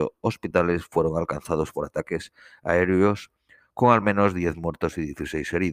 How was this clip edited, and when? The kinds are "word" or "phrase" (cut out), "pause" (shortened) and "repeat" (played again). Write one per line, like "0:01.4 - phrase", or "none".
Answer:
none